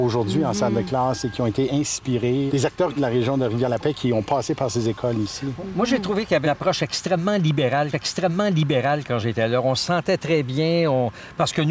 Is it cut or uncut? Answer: cut